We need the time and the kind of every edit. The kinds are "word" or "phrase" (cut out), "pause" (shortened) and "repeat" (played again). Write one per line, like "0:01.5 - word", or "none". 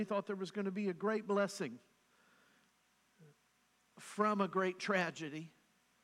none